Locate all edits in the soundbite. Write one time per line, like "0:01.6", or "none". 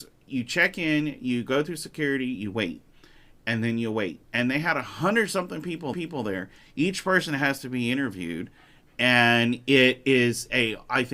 0:04.2
0:05.9